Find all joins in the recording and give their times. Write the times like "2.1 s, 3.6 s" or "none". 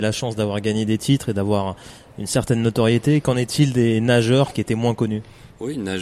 4.5 s